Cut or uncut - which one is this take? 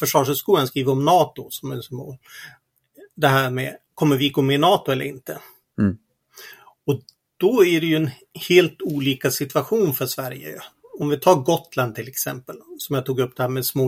uncut